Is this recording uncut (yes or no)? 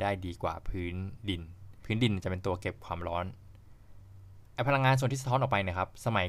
yes